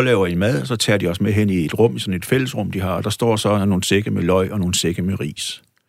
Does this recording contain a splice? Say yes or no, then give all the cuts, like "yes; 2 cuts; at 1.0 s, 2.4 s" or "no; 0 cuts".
no; 0 cuts